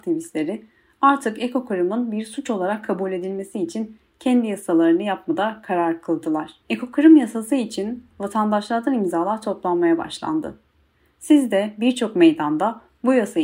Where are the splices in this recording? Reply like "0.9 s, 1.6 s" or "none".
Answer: 6.6 s